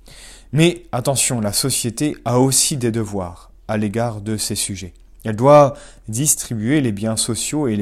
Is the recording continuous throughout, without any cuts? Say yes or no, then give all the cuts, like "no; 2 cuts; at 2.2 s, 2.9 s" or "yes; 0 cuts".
yes; 0 cuts